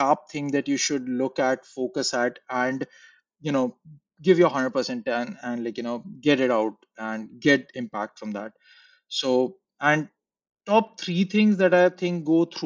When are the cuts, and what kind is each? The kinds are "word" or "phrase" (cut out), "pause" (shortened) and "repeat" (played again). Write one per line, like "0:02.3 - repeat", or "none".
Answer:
none